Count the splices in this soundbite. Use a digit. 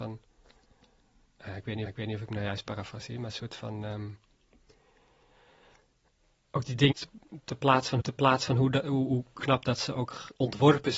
3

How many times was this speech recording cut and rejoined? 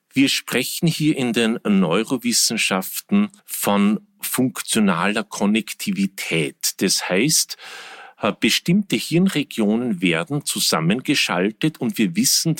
1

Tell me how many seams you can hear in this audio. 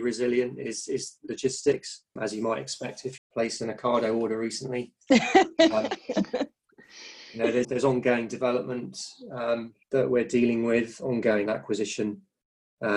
5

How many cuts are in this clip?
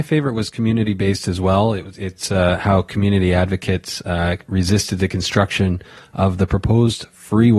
0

